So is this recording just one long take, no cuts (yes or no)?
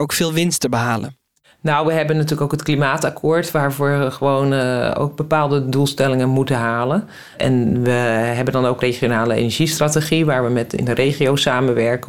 yes